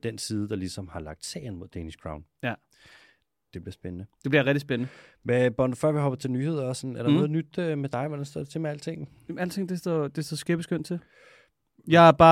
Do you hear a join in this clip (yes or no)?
no